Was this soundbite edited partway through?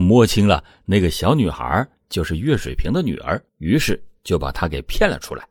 yes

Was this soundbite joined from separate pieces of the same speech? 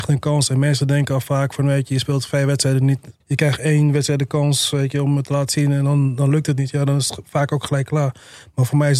yes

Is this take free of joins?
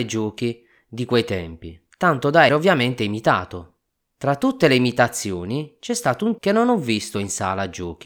no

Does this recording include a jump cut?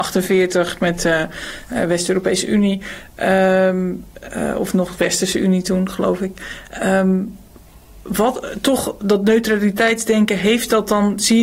no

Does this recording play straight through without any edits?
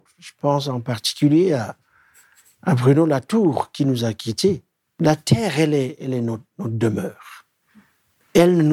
yes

